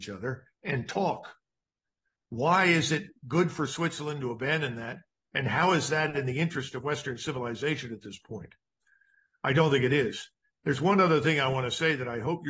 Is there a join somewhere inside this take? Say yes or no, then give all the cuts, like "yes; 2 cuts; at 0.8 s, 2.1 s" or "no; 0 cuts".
no; 0 cuts